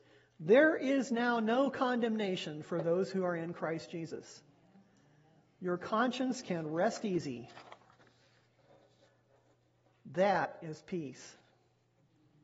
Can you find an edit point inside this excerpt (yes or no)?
no